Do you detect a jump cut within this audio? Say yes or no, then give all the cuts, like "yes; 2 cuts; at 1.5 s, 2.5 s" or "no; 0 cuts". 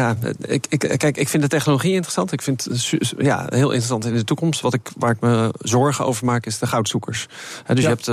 no; 0 cuts